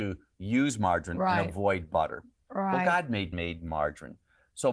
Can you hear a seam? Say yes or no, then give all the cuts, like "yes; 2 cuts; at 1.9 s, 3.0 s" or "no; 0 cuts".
yes; 1 cut; at 3.3 s